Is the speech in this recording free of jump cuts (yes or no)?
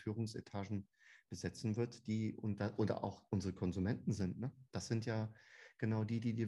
yes